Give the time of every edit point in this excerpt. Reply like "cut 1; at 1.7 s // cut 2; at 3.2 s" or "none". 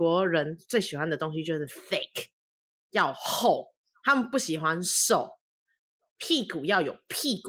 none